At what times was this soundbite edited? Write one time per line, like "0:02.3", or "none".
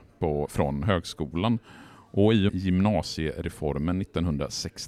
0:02.5